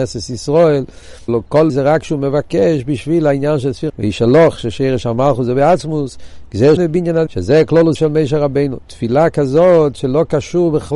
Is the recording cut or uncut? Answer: cut